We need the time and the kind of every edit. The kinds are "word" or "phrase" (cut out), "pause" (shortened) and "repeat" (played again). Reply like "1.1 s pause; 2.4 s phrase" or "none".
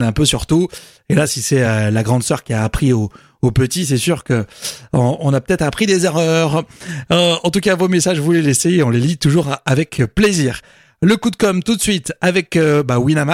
none